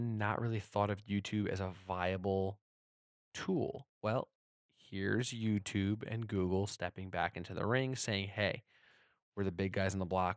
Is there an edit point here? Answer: no; 0 cuts

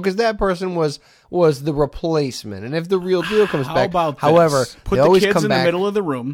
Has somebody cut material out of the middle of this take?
no; 0 cuts

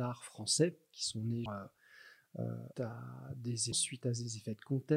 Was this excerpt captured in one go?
no; 3 cuts; at 1.5 s, 2.7 s, 3.7 s

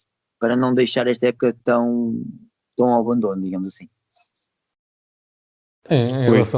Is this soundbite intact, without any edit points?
yes; 0 cuts

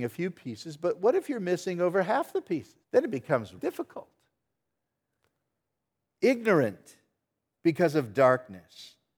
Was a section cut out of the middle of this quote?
yes; 2 cuts; at 2.8 s, 3.6 s

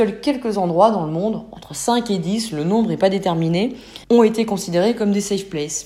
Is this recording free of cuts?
no; 1 cut; at 4.0 s

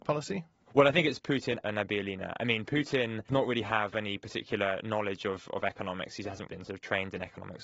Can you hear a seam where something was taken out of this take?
yes; 3 cuts; at 1.6 s, 3.3 s, 6.5 s

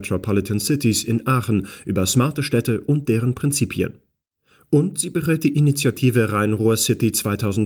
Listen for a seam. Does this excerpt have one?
no; 0 cuts

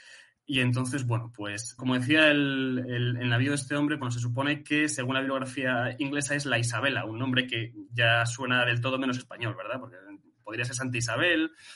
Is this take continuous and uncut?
no; 2 cuts; at 1.8 s, 4.0 s

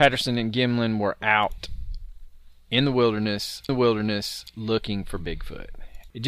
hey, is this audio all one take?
no; 1 cut; at 3.7 s

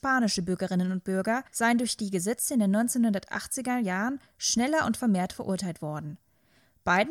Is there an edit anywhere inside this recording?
yes; 1 cut; at 1.5 s

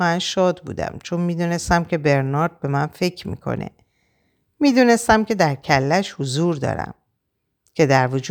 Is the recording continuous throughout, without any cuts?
yes; 0 cuts

